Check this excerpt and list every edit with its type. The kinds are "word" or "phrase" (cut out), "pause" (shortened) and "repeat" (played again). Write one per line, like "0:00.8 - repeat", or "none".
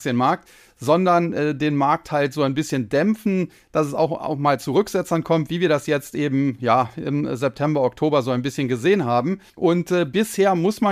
0:09.5 - pause